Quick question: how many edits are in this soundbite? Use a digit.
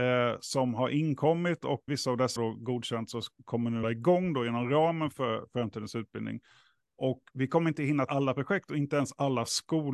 4